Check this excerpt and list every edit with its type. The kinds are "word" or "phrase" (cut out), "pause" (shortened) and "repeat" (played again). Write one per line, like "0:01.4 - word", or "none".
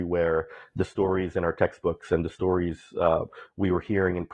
none

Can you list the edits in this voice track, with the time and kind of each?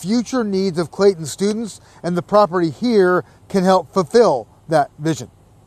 none

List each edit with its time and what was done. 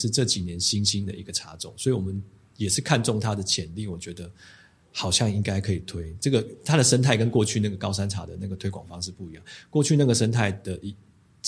none

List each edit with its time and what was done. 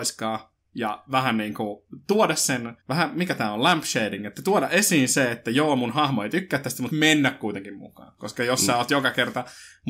0:02.8 - pause
0:06.9 - word

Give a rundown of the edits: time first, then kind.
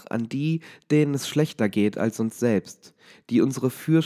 none

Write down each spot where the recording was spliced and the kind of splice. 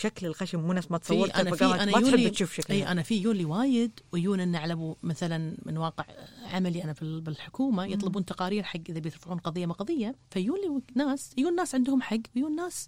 0:10.2 - pause

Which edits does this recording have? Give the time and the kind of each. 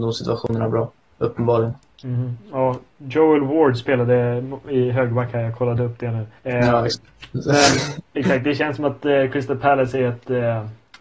0:01.9 - pause
0:06.4 - pause

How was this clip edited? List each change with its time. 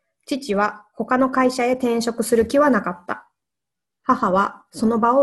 none

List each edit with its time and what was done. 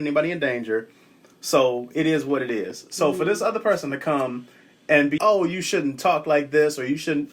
0:05.2 - word

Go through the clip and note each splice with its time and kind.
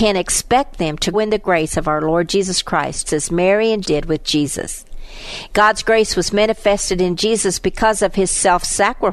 0:01.1 - word
0:03.1 - word
0:03.8 - word

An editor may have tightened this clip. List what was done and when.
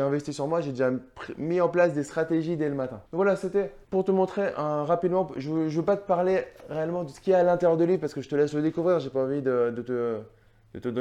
0:03.1 - pause
0:03.8 - pause

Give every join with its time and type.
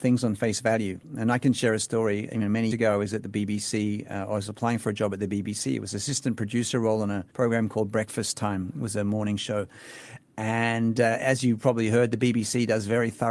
0:02.7 - word
0:07.3 - pause

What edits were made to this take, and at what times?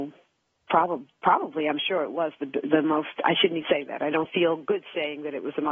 0:03.6 - word

